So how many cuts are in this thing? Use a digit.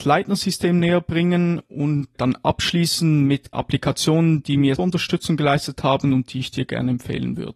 3